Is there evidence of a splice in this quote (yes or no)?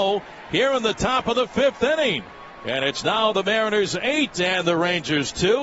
no